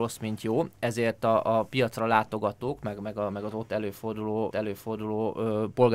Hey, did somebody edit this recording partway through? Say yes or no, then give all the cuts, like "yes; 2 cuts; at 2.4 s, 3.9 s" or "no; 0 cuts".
yes; 1 cut; at 4.5 s